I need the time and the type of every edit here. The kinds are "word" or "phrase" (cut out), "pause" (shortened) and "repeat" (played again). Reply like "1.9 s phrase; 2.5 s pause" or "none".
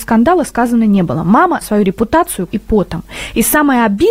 1.6 s phrase; 2.5 s word